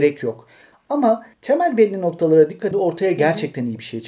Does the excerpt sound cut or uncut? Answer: cut